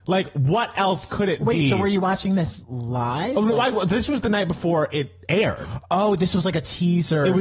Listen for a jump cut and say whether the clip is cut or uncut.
uncut